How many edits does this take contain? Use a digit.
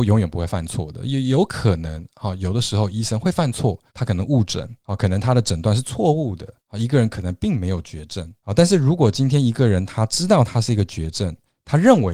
4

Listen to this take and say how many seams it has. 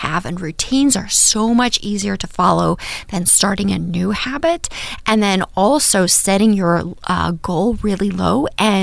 0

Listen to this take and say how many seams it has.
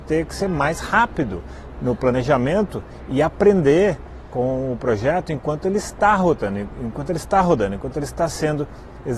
1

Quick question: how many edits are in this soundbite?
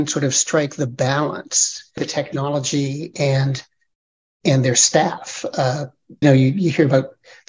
2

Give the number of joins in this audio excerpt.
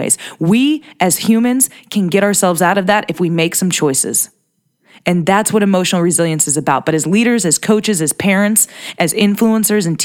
0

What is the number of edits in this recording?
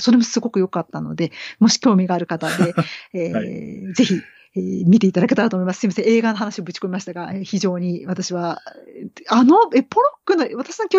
0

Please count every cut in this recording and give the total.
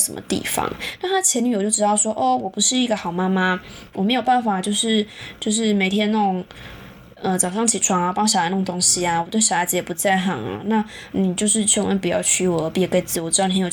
0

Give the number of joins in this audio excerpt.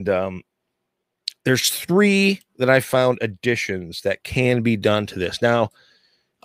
1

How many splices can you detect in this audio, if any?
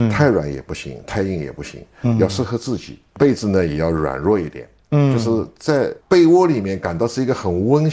1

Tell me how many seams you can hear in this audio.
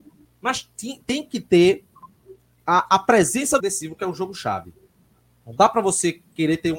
1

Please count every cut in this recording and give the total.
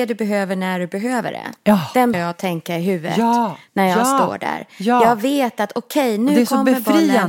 1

